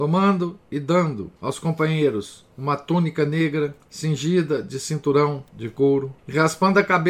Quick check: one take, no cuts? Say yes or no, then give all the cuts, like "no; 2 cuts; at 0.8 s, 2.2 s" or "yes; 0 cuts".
no; 5 cuts; at 1.4 s, 2.5 s, 3.8 s, 5.5 s, 6.2 s